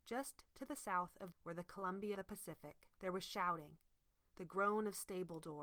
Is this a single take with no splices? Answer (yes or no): no